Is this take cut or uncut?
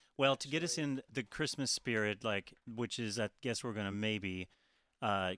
uncut